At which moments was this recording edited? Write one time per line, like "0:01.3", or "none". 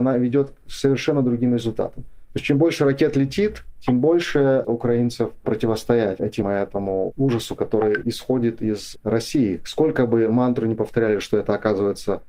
0:04.6
0:06.4

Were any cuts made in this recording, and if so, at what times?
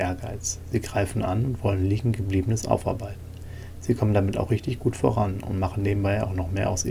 none

